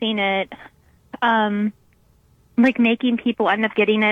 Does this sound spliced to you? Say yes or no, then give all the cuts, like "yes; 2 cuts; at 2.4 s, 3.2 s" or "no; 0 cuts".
no; 0 cuts